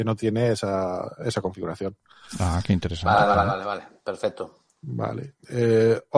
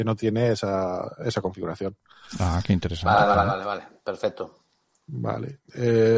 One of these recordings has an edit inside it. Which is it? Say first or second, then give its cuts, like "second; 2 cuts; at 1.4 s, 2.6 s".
first; 1 cut; at 4.7 s